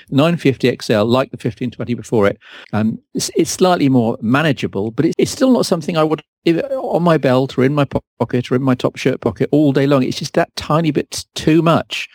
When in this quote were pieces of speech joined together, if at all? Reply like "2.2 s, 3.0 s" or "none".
2.6 s, 5.1 s, 6.3 s